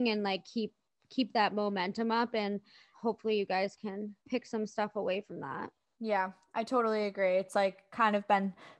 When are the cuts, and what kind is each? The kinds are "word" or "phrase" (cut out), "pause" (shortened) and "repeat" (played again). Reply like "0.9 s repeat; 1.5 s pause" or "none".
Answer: 2.9 s word; 4.2 s pause